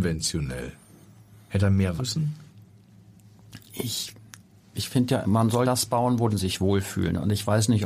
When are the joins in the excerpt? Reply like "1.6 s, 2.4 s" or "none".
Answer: 1.6 s, 2.0 s, 4.7 s, 5.2 s, 5.6 s, 6.3 s